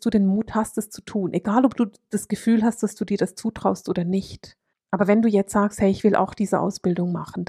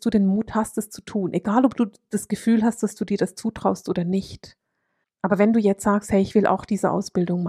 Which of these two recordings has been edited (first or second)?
first